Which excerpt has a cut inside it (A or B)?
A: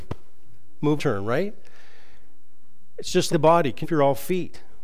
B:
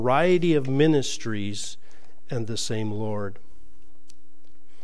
A